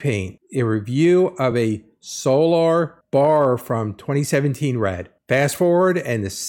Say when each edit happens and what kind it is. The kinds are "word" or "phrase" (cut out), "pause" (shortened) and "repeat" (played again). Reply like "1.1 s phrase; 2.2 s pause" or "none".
none